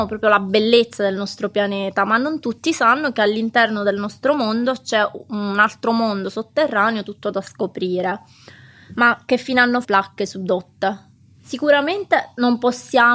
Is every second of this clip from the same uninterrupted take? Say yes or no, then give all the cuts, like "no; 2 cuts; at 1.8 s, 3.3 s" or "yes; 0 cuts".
no; 1 cut; at 9.8 s